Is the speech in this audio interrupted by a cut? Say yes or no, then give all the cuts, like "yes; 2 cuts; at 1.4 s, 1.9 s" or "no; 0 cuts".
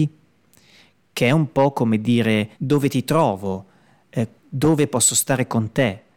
yes; 2 cuts; at 2.5 s, 4.4 s